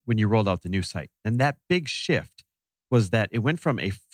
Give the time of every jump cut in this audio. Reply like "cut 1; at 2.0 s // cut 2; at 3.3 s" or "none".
none